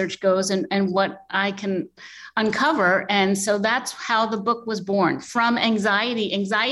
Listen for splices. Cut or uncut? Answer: uncut